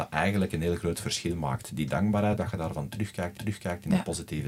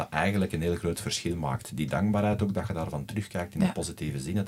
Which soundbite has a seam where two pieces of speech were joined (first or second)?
first